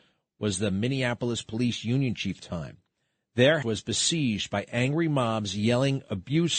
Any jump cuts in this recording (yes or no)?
yes